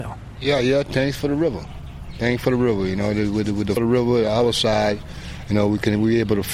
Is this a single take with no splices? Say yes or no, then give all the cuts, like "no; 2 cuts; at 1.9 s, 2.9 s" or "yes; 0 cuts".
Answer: no; 1 cut; at 3.8 s